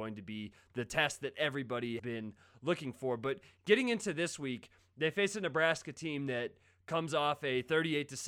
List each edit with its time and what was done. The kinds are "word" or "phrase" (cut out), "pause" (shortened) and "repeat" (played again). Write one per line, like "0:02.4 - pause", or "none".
0:02.0 - word